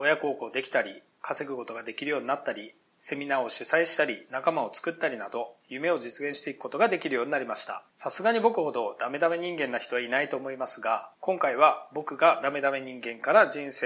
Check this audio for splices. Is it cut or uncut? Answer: cut